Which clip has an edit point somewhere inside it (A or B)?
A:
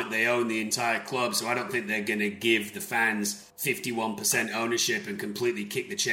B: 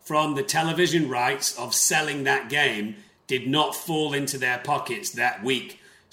A